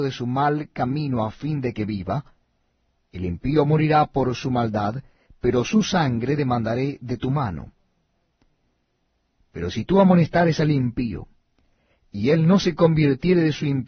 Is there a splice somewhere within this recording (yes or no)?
no